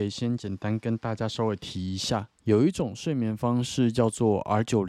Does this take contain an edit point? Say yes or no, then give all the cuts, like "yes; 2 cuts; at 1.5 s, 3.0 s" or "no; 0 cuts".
yes; 1 cut; at 2.3 s